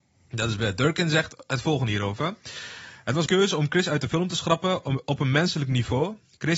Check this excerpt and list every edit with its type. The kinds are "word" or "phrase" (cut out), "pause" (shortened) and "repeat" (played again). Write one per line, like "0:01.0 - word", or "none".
0:03.3 - word